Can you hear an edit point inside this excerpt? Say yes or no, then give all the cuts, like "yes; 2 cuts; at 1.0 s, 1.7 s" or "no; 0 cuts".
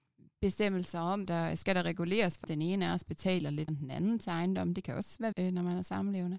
yes; 4 cuts; at 1.3 s, 2.4 s, 3.7 s, 5.3 s